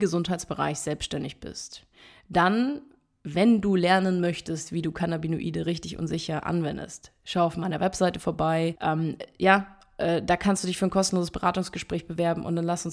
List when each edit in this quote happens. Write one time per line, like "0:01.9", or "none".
none